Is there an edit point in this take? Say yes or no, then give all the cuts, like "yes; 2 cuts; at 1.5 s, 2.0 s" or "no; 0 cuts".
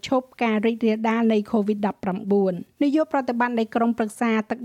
yes; 1 cut; at 2.7 s